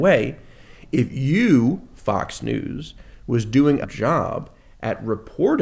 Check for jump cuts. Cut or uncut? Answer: cut